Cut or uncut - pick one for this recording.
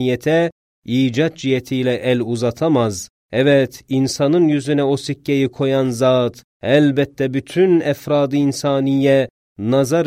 cut